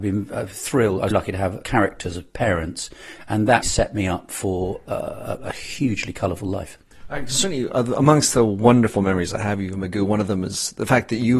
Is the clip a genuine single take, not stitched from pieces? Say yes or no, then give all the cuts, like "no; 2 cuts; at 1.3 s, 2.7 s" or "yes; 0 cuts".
no; 3 cuts; at 1.1 s, 1.6 s, 3.6 s